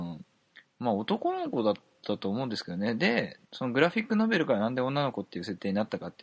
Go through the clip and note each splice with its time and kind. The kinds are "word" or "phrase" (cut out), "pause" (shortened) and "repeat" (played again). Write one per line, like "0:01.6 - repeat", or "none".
0:03.5 - pause